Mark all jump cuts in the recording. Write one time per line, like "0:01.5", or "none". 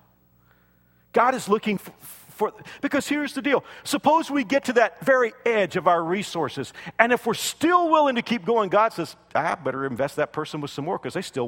none